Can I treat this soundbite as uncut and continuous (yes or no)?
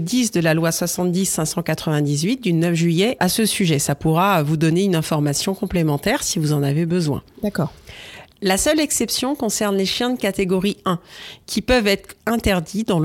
yes